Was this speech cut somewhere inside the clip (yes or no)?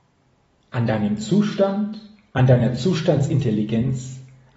no